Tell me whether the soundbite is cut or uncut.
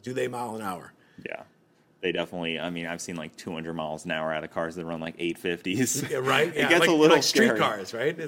uncut